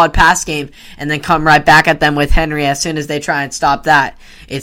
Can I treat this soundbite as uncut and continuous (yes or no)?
yes